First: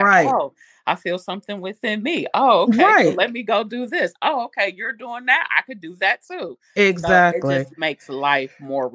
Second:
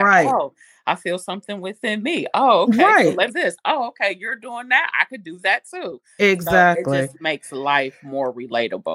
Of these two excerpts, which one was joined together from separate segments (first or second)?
second